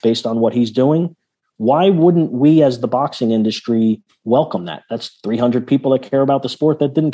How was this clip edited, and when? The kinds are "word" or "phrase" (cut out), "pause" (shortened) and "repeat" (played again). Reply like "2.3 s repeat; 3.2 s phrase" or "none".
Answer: none

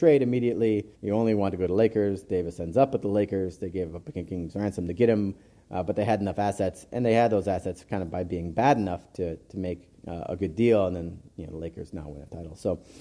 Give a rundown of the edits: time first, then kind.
0.9 s pause; 10.0 s pause

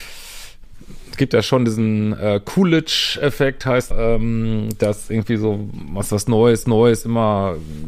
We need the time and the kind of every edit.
3.9 s word; 6.6 s repeat

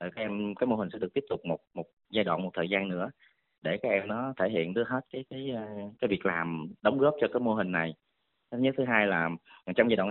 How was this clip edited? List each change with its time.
6.0 s pause; 6.8 s pause

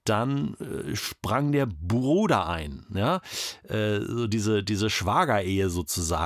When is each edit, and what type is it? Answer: none

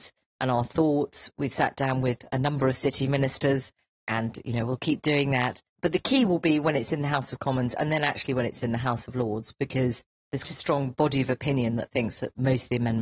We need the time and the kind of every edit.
10.4 s word

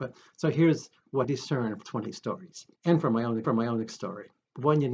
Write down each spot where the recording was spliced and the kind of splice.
1.2 s word; 1.8 s word; 2.8 s pause; 3.4 s repeat

